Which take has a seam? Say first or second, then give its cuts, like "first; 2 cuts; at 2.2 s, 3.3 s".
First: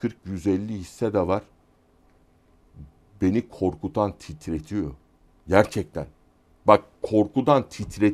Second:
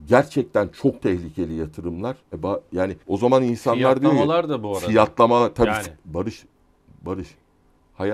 second; 2 cuts; at 2.2 s, 3.0 s